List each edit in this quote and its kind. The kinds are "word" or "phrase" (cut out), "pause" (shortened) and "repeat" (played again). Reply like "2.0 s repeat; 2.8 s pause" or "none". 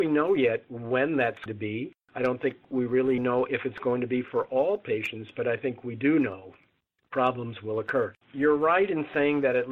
1.5 s word; 3.2 s word; 6.8 s pause; 8.2 s pause